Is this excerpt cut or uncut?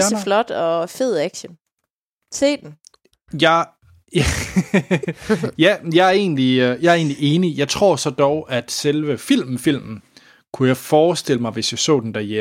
uncut